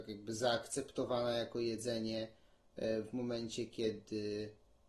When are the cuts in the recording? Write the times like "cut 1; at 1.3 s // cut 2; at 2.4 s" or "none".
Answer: none